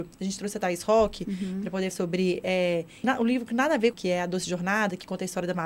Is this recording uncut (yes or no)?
no